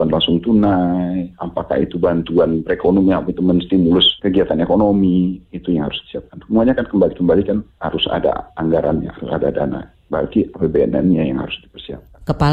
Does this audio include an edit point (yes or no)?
yes